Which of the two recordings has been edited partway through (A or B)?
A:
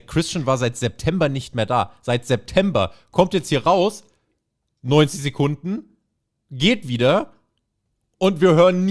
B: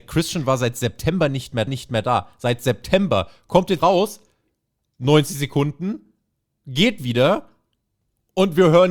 B